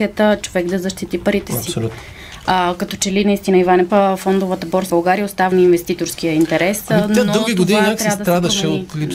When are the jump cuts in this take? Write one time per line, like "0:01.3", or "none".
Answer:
0:03.9
0:04.9
0:05.5